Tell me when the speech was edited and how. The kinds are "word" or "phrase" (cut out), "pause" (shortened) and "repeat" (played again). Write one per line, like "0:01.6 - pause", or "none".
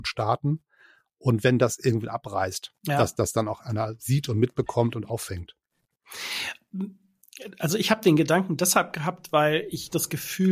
0:02.8 - pause